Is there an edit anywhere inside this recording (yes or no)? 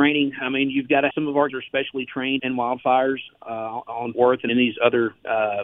yes